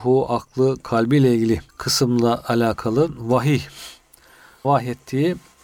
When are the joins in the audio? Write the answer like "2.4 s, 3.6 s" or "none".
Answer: 1.7 s, 4.6 s